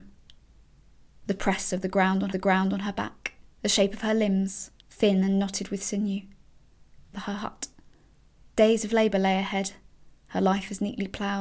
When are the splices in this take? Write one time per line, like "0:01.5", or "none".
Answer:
0:02.3
0:03.5
0:04.8
0:07.1
0:08.3